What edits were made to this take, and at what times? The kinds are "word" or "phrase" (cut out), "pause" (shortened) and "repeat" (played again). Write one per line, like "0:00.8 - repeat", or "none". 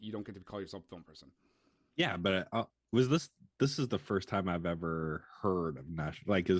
0:02.7 - word